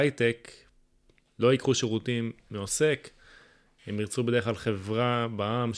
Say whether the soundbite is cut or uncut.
uncut